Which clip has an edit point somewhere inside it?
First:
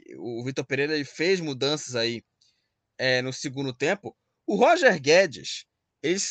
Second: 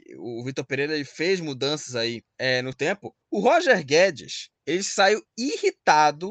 second; 4 cuts; at 2.3 s, 2.7 s, 3.2 s, 4.6 s

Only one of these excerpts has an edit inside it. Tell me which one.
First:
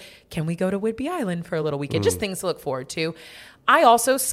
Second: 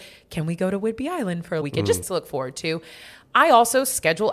second; 2 cuts; at 1.6 s, 2.0 s

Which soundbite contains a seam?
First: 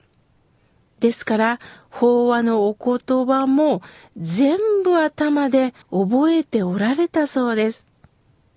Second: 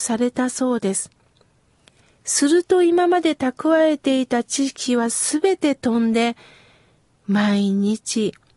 first; 1 cut; at 5.8 s

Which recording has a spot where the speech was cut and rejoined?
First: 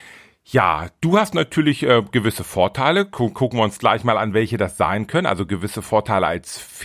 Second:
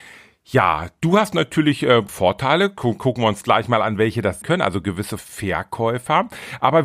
second; 3 cuts; at 2.1 s, 4.4 s, 5.2 s

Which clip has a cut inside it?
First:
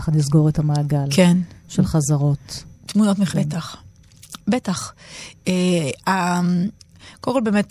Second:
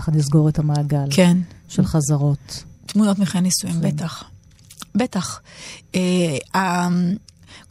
first; 1 cut; at 3.3 s

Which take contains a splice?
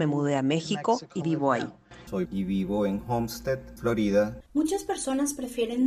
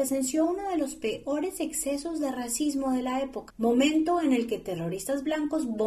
first; 3 cuts; at 1.2 s, 2.2 s, 4.5 s

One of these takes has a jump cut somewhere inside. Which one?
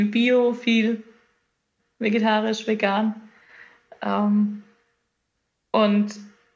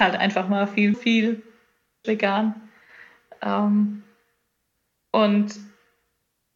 second; 2 cuts; at 0.9 s, 2.0 s

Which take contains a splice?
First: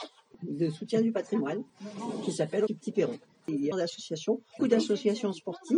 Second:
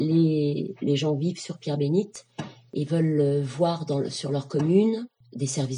first; 3 cuts; at 2.7 s, 3.7 s, 4.6 s

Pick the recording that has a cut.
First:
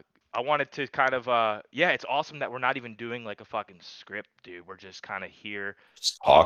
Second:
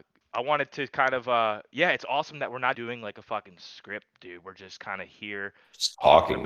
second; 1 cut; at 2.7 s

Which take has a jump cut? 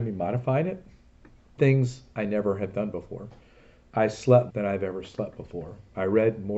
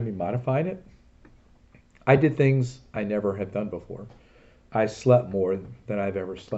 first; 2 cuts; at 1.6 s, 4.5 s

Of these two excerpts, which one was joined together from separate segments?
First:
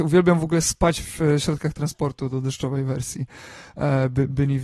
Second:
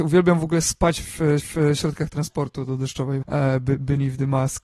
second; 2 cuts; at 1.4 s, 3.2 s

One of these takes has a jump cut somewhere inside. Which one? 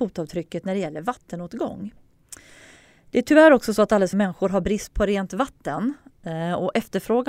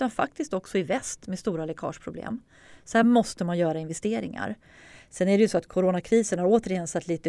first; 1 cut; at 4.1 s

